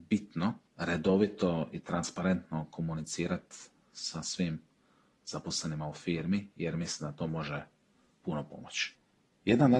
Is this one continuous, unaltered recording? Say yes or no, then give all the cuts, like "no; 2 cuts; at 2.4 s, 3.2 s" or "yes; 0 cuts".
yes; 0 cuts